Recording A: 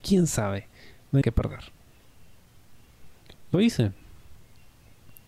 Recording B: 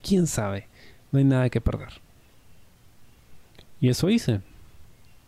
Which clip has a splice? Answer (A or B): A